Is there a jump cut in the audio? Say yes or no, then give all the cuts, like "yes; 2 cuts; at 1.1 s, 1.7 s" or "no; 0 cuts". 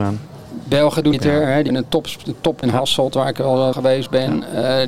yes; 4 cuts; at 1.1 s, 1.7 s, 2.6 s, 3.7 s